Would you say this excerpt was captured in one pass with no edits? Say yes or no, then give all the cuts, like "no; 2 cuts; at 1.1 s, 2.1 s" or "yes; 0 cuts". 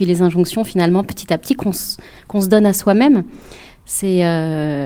yes; 0 cuts